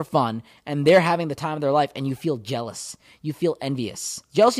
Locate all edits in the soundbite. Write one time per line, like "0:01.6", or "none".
none